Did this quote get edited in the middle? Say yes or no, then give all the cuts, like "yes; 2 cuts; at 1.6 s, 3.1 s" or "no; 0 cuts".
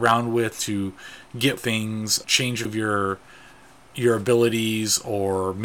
yes; 3 cuts; at 1.6 s, 2.2 s, 2.7 s